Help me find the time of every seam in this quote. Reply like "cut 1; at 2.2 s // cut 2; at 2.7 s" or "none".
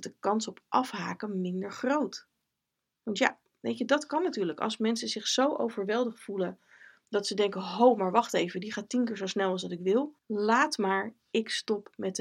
cut 1; at 10.2 s

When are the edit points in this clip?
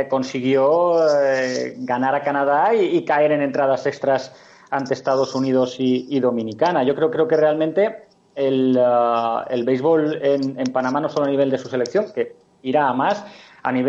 cut 1; at 7.1 s

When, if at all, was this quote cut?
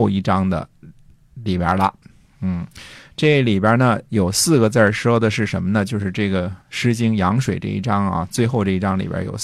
cut 1; at 6.6 s

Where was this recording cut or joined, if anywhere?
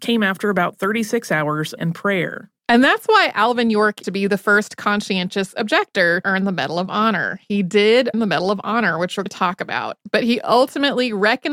cut 1; at 1.8 s // cut 2; at 2.6 s // cut 3; at 4.0 s // cut 4; at 6.2 s // cut 5; at 8.1 s // cut 6; at 9.3 s

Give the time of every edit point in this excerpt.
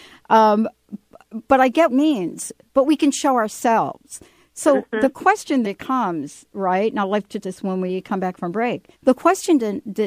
cut 1; at 1.9 s // cut 2; at 5.6 s // cut 3; at 7.4 s // cut 4; at 8.9 s

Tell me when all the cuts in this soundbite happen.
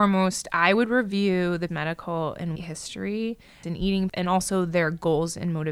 cut 1; at 1.7 s // cut 2; at 2.6 s // cut 3; at 3.6 s // cut 4; at 4.1 s

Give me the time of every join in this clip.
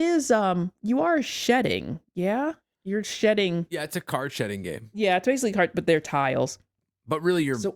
none

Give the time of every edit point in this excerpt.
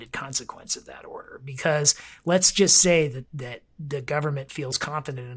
none

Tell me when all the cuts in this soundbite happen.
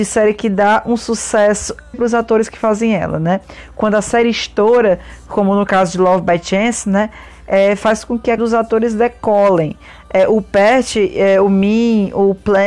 cut 1; at 1.9 s // cut 2; at 8.4 s

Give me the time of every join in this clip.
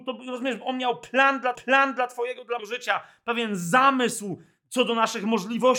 cut 1; at 1.5 s // cut 2; at 2.6 s

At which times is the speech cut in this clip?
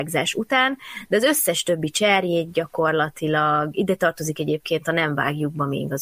none

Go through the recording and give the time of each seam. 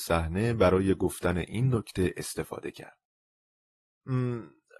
none

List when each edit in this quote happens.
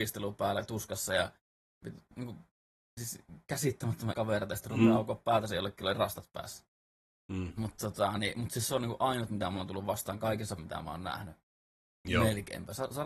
cut 1; at 4.1 s // cut 2; at 10.6 s

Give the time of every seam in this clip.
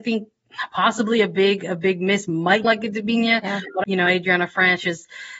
cut 1; at 2.6 s // cut 2; at 3.8 s

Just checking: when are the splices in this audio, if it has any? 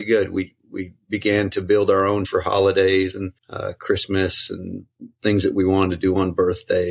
cut 1; at 2.2 s // cut 2; at 3.4 s

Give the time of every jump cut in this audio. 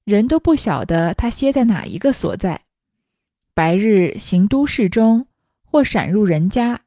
none

